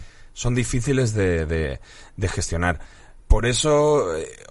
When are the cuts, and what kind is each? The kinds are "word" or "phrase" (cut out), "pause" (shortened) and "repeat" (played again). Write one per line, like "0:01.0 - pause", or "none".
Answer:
0:03.2 - pause